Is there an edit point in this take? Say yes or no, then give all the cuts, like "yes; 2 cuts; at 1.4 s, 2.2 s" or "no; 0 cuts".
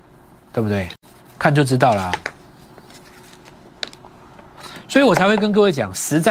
no; 0 cuts